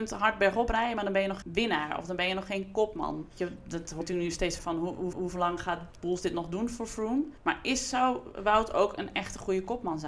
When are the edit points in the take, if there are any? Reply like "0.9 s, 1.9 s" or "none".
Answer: 1.4 s, 3.3 s, 4.0 s, 4.6 s, 5.1 s, 7.4 s